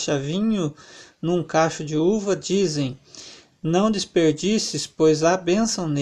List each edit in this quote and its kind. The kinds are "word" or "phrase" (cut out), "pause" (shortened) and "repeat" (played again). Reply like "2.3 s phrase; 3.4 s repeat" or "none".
none